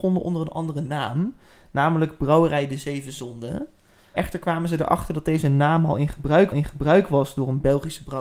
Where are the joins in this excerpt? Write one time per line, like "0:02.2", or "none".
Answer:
0:06.5